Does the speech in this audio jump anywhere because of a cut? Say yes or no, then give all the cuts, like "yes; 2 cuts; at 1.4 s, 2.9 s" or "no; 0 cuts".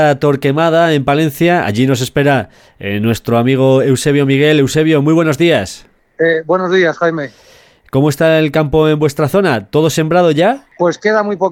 no; 0 cuts